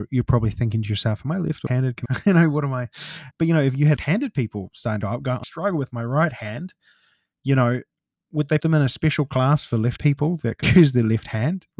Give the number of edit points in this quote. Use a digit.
9